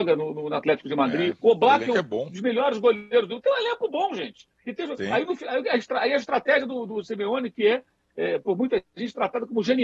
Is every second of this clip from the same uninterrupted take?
yes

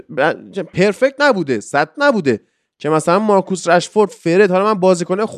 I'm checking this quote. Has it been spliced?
yes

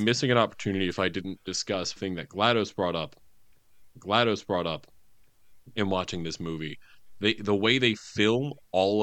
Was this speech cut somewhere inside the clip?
yes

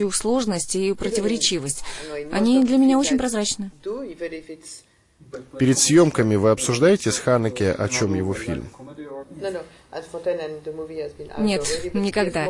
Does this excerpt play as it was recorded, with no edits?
yes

